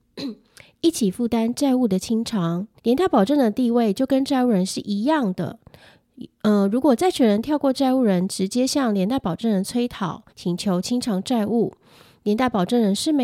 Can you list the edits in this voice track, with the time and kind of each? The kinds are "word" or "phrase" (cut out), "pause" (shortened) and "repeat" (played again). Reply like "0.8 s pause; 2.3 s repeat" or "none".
2.8 s pause; 10.3 s pause